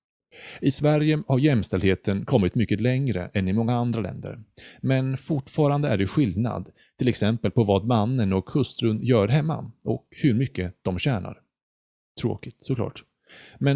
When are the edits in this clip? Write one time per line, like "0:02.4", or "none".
none